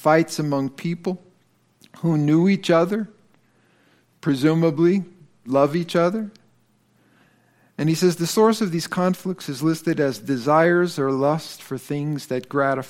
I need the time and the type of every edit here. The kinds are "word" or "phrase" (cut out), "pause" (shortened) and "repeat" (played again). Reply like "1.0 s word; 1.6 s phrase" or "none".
none